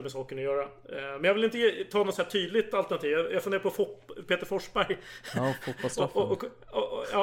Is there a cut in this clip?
no; 0 cuts

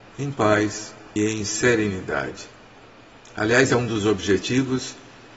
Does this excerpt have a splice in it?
yes; 2 cuts; at 1.2 s, 3.7 s

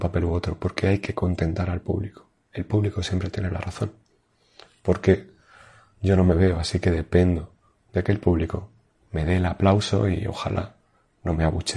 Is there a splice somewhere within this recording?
no; 0 cuts

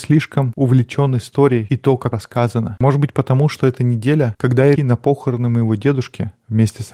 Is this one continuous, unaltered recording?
no; 2 cuts; at 2.1 s, 4.8 s

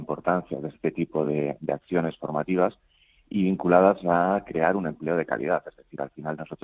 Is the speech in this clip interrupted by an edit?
no; 0 cuts

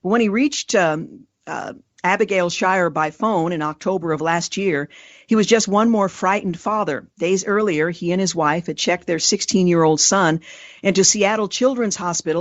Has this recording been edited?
no; 0 cuts

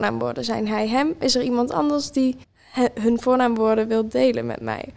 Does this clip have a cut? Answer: yes; 1 cut; at 2.4 s

